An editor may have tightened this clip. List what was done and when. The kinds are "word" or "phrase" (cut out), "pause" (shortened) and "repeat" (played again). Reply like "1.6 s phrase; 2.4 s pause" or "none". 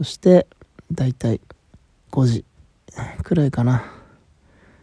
1.9 s pause